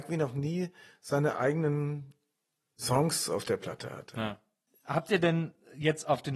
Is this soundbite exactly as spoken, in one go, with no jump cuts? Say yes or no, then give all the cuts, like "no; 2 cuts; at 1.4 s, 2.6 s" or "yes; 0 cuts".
yes; 0 cuts